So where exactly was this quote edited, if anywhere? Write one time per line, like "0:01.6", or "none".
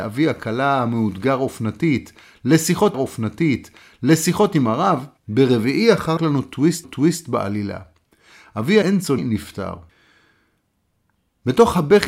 0:02.9
0:05.2
0:06.2
0:06.8
0:08.8
0:09.2